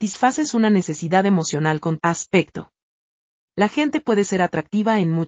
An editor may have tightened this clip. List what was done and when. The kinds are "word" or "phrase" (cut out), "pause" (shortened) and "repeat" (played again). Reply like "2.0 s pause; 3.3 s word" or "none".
2.0 s word